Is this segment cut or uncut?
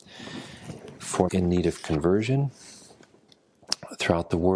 cut